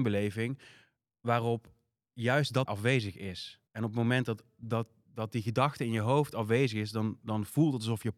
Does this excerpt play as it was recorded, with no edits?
no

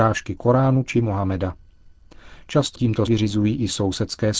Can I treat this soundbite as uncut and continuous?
no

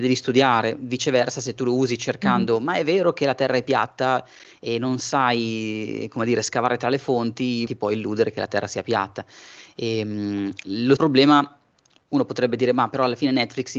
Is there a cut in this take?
yes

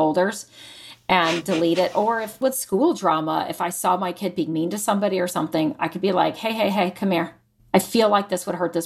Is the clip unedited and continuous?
no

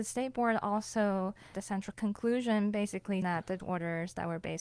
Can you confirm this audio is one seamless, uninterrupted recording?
no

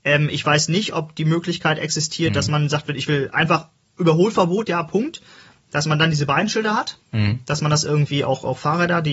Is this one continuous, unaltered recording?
yes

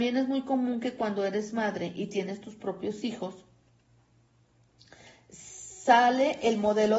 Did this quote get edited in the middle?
no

